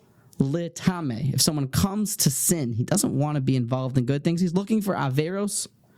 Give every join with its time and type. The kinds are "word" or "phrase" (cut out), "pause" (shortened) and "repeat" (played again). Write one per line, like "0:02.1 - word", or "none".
none